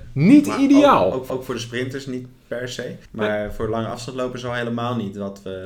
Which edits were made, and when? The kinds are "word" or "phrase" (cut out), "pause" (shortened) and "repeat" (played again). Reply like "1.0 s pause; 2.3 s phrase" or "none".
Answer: 1.3 s repeat; 3.0 s pause

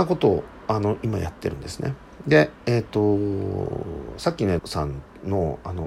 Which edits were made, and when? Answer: 4.6 s word

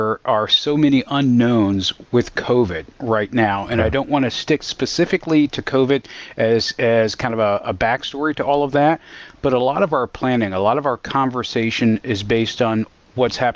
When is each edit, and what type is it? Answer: none

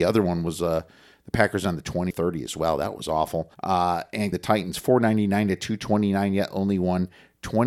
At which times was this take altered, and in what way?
2.1 s phrase; 3.5 s pause; 4.3 s phrase

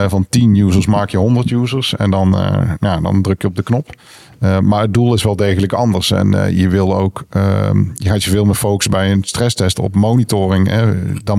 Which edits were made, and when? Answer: none

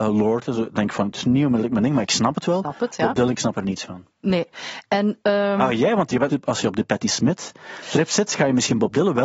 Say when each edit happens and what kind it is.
6.3 s word

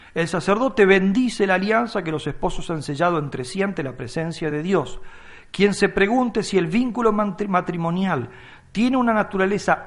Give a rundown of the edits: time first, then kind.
none

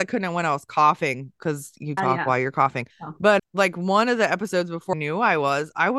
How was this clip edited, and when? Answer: 2.0 s word; 2.9 s pause; 3.4 s word; 4.9 s word

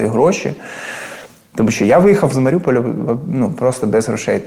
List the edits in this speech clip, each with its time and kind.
none

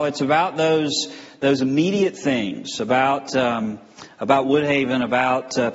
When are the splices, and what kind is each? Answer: none

